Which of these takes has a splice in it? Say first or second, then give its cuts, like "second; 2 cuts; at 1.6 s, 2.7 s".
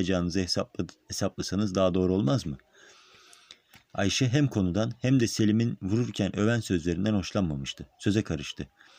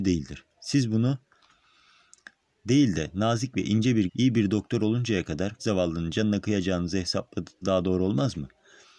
second; 4 cuts; at 2.4 s, 4.1 s, 5.6 s, 7.6 s